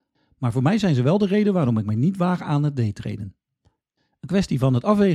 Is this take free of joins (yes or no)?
yes